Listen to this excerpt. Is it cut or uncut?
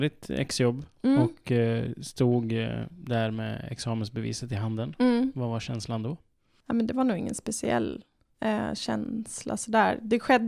uncut